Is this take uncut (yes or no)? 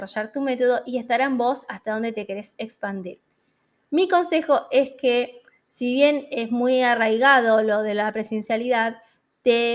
yes